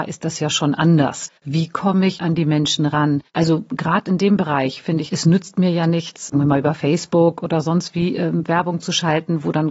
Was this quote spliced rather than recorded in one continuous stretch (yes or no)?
yes